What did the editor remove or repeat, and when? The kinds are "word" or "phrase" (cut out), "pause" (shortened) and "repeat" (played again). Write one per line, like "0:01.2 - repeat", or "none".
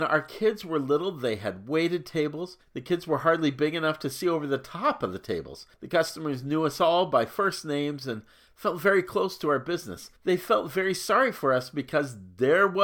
0:02.6 - pause
0:05.7 - pause
0:10.2 - pause